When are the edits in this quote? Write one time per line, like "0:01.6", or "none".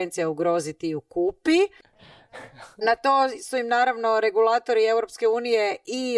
none